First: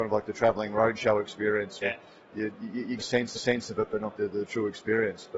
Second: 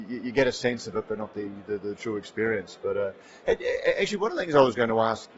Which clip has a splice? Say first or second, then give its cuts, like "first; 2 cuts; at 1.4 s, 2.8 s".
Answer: first; 4 cuts; at 1.8 s, 3.0 s, 3.3 s, 4.2 s